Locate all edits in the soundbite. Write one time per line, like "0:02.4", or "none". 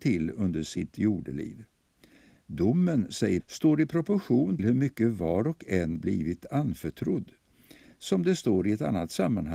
0:03.4
0:04.6
0:06.0